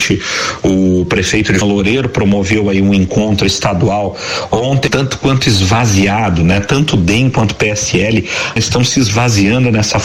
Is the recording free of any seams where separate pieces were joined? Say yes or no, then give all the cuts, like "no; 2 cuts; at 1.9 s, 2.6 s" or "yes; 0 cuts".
no; 3 cuts; at 1.6 s, 4.9 s, 8.6 s